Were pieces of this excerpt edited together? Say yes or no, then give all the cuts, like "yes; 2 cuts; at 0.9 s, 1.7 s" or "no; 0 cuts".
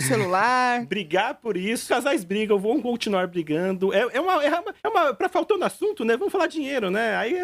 yes; 2 cuts; at 1.9 s, 4.8 s